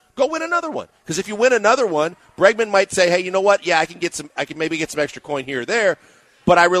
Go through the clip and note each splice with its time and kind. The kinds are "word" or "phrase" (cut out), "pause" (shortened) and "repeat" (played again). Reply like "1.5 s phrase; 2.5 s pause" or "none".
none